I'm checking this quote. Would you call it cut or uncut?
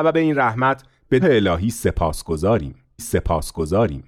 cut